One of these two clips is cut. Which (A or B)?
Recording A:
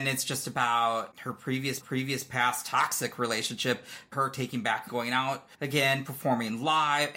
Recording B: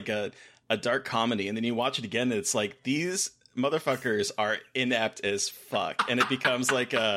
A